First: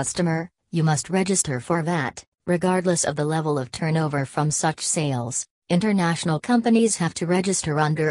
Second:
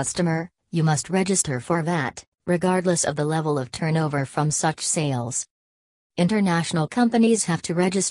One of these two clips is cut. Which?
first; 1 cut; at 5.6 s

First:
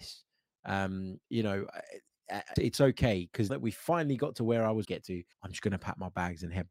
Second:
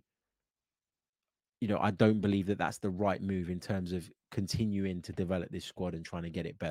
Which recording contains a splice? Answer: first; 5 cuts; at 1.2 s, 2.6 s, 3.5 s, 4.8 s, 5.3 s

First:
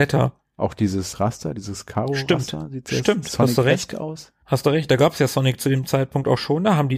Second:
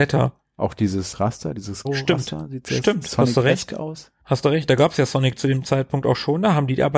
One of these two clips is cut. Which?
second; 1 cut; at 1.8 s

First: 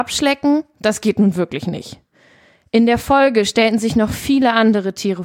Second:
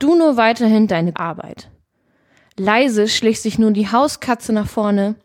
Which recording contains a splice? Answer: second; 1 cut; at 1.1 s

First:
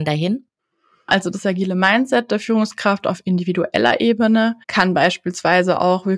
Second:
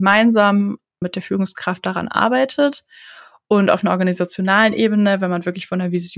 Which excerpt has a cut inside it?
first; 1 cut; at 4.6 s

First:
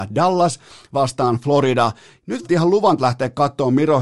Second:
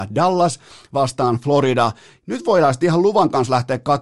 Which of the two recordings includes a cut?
first; 2 cuts; at 2.4 s, 3.0 s

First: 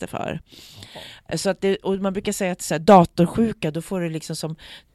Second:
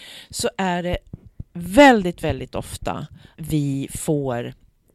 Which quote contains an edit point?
second; 2 cuts; at 1.5 s, 3.4 s

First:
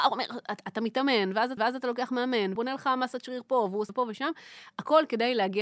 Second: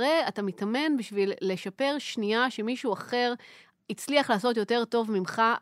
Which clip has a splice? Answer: first; 3 cuts; at 1.6 s, 2.6 s, 3.9 s

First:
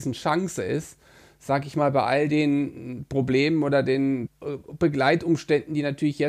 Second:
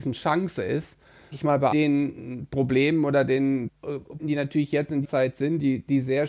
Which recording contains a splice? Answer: second; 4 cuts; at 1.3 s, 1.7 s, 4.2 s, 5.0 s

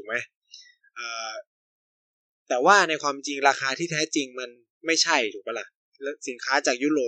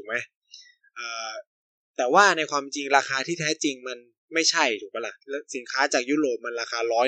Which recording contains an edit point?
second; 2 cuts; at 1.6 s, 5.2 s

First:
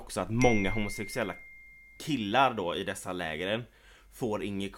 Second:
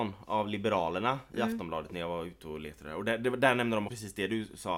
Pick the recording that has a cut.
second; 1 cut; at 3.9 s

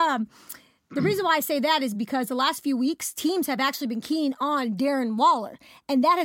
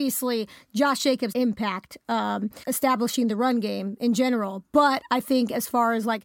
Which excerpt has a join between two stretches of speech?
second; 2 cuts; at 1.3 s, 2.6 s

